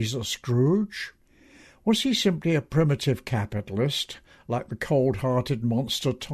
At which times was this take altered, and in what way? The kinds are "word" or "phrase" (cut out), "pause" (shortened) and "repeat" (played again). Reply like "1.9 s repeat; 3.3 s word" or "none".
none